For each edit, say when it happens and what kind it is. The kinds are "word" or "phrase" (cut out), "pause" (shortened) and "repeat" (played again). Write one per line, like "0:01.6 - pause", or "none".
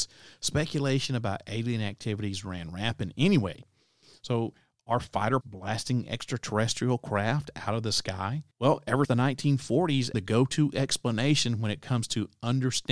0:05.4 - word
0:08.5 - pause
0:09.0 - word
0:10.1 - phrase